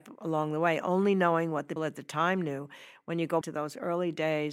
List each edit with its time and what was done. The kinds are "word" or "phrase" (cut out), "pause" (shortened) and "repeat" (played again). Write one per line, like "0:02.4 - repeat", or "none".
0:01.8 - word
0:03.4 - word